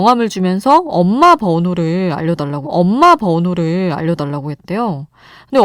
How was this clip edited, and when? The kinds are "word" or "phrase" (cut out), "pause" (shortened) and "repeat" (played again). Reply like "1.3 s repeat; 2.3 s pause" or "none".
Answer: 2.6 s repeat